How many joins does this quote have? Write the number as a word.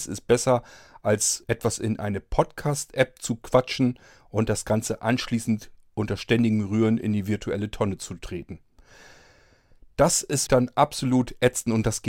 two